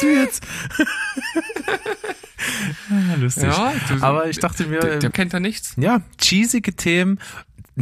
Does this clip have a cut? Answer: yes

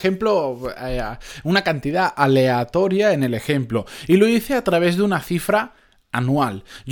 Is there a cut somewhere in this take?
no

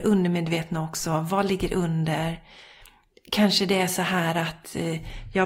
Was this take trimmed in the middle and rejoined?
no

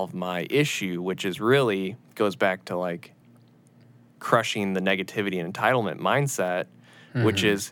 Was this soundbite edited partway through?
no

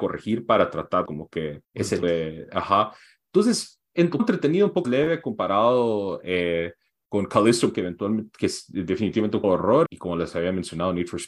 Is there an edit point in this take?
yes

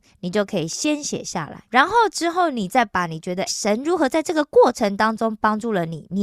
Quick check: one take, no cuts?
no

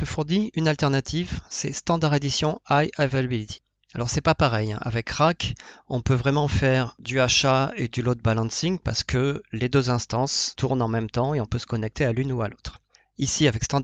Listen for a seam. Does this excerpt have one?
no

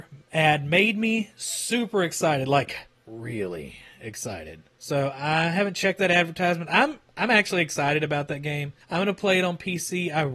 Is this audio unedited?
no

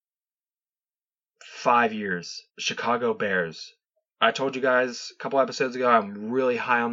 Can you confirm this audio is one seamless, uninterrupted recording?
no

